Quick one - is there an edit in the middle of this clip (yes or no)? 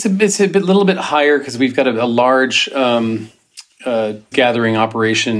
yes